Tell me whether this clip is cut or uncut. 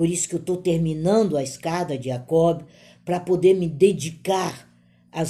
uncut